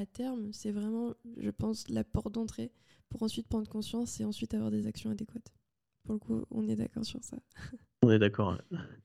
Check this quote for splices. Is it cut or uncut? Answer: uncut